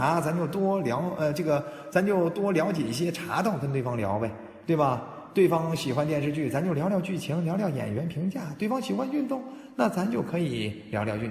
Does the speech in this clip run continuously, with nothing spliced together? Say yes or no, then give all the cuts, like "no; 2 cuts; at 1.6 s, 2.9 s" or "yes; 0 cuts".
yes; 0 cuts